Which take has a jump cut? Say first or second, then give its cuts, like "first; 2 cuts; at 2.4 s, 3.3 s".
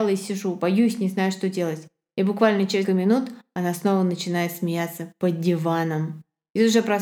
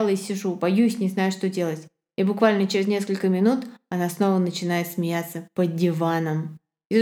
first; 1 cut; at 2.8 s